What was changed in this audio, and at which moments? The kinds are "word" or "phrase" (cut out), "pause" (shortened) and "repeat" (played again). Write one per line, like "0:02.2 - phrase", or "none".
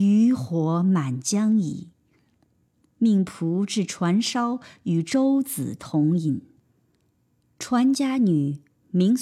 none